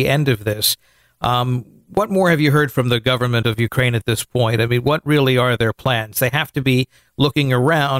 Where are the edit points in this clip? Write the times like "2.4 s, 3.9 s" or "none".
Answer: none